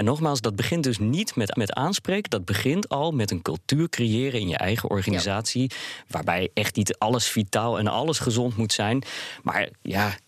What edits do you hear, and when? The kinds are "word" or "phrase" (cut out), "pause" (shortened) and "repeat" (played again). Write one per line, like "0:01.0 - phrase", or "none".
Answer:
0:01.5 - repeat